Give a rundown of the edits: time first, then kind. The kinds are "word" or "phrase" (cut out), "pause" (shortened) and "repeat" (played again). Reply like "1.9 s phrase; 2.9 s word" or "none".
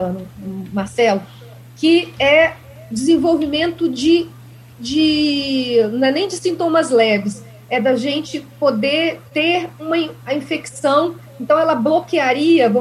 none